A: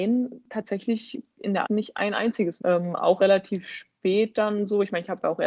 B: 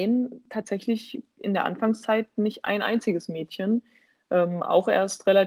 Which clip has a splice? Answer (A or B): A